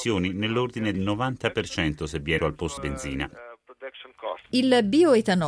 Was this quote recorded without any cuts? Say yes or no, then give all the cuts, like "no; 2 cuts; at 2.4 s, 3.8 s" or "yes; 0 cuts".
no; 4 cuts; at 0.9 s, 2.4 s, 2.8 s, 4.4 s